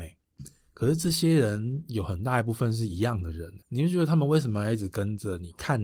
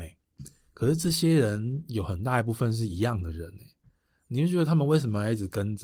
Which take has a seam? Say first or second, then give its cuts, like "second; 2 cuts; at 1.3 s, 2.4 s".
first; 1 cut; at 3.6 s